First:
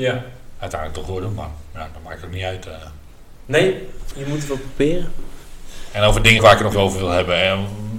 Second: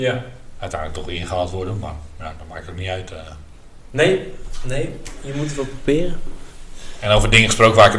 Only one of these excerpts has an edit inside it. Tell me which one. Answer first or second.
first